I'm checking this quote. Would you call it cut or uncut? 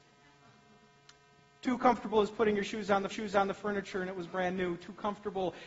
cut